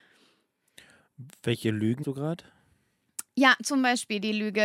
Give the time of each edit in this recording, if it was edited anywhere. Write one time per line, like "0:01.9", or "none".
0:02.0